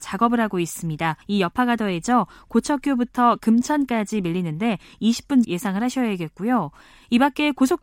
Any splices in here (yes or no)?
yes